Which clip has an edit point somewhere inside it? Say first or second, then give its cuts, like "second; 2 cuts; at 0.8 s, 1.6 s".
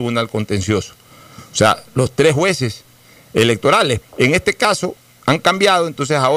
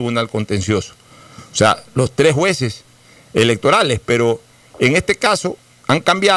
first; 1 cut; at 4.0 s